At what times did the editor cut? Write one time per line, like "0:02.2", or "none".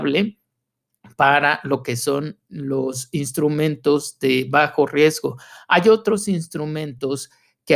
none